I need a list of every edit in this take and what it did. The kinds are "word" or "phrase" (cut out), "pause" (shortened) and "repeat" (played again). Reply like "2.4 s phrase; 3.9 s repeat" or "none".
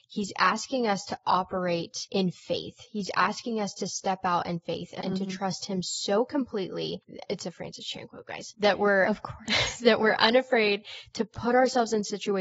5.0 s phrase

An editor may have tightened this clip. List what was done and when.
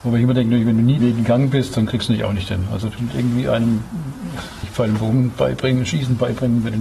1.0 s word; 3.0 s word; 4.6 s word

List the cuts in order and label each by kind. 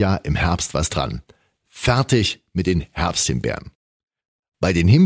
none

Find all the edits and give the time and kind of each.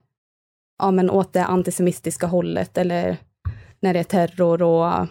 none

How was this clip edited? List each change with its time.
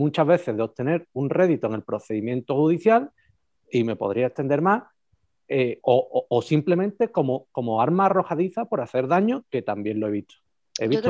3.5 s pause

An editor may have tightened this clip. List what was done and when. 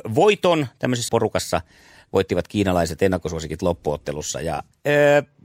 1.1 s word

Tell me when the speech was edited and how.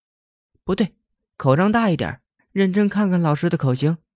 2.4 s pause

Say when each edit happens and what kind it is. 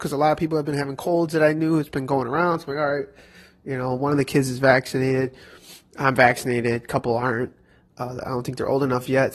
none

